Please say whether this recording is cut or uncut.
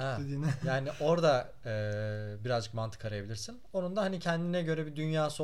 uncut